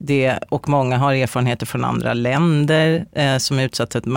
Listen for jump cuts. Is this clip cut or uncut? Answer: uncut